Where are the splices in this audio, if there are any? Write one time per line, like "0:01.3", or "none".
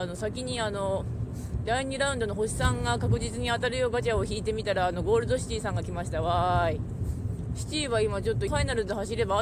0:08.5